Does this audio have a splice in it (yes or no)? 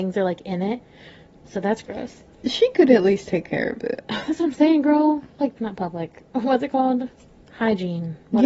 yes